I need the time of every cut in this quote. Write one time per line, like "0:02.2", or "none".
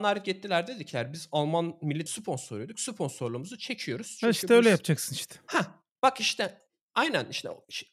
0:02.1